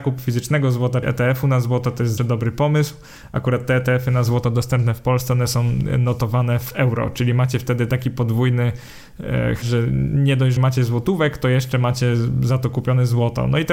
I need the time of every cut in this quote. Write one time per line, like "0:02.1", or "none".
0:01.0
0:02.2
0:09.6
0:10.6